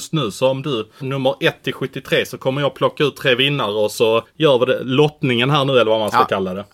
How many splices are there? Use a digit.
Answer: 2